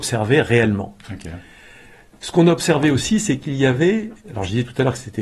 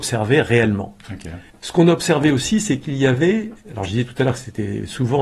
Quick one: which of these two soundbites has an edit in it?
second; 1 cut; at 1.5 s

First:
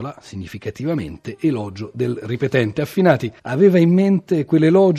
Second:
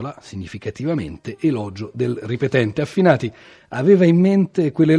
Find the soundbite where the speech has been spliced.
first; 1 cut; at 3.4 s

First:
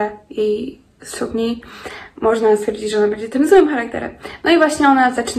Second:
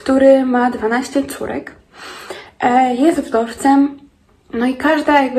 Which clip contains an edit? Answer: second; 1 cut; at 4.3 s

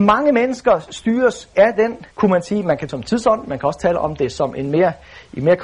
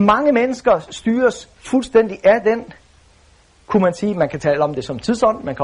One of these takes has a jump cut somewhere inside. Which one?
first; 3 cuts; at 1.5 s, 2.1 s, 2.9 s

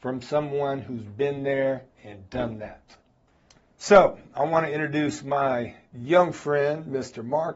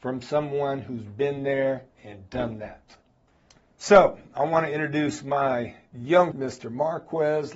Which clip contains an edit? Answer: second; 1 cut; at 6.3 s

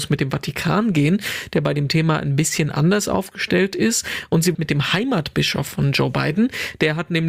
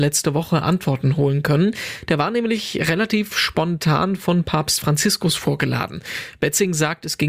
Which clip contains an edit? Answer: first; 1 cut; at 4.5 s

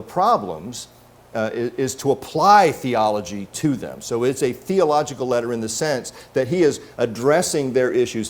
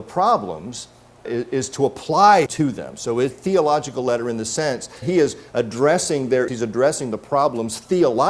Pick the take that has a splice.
second; 5 cuts; at 1.2 s, 2.5 s, 3.3 s, 5.0 s, 6.5 s

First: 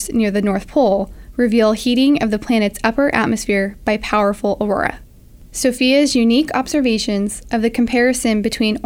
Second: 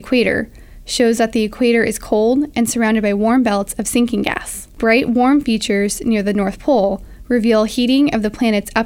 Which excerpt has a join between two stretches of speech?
second; 1 cut; at 4.7 s

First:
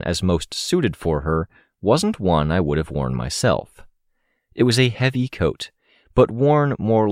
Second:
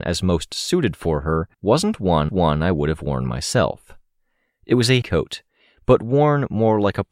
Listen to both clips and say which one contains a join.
second; 3 cuts; at 1.5 s, 2.3 s, 5.0 s

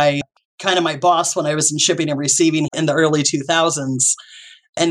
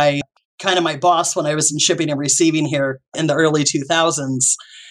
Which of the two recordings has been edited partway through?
first; 1 cut; at 2.7 s

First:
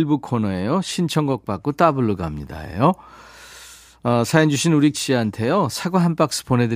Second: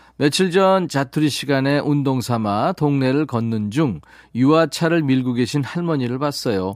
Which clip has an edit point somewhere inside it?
first; 1 cut; at 4.9 s

